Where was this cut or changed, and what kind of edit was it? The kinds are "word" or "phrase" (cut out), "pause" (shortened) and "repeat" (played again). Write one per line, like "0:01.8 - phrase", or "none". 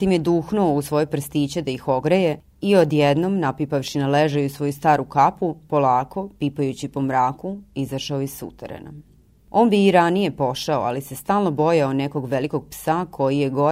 none

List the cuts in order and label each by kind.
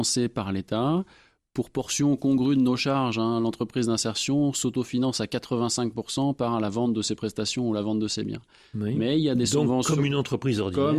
none

